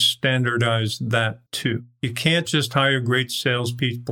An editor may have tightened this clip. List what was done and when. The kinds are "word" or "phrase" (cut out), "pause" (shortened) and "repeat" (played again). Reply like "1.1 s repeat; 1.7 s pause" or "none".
1.5 s pause